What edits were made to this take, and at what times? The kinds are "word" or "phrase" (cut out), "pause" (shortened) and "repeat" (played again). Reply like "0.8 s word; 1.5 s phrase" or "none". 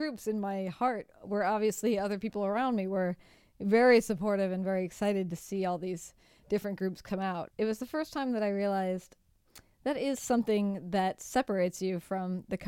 none

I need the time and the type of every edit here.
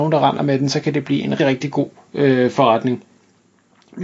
1.4 s word

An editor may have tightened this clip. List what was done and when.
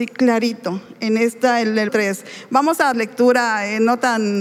1.9 s word; 2.9 s phrase

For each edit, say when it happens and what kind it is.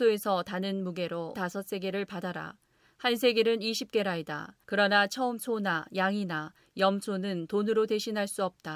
1.3 s word; 4.6 s pause; 5.4 s word

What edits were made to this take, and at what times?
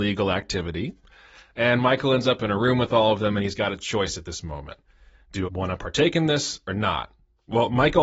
5.4 s word

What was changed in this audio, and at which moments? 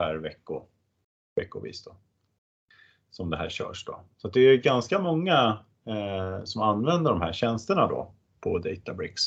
none

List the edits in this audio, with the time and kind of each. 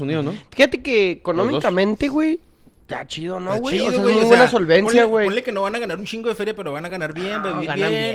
none

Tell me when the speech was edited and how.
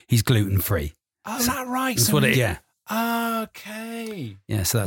1.5 s word; 2.3 s word

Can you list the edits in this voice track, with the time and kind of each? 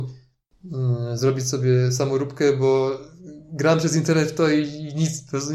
none

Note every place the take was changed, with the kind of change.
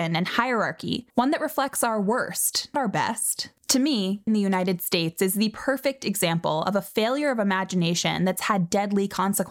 1.1 s pause; 2.7 s word; 3.6 s pause; 4.3 s phrase

